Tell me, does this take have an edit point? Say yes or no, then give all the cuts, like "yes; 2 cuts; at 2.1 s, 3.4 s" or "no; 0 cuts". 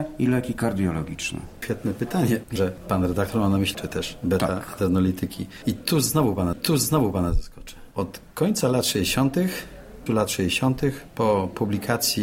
yes; 5 cuts; at 2.6 s, 3.7 s, 6.5 s, 8.3 s, 10.1 s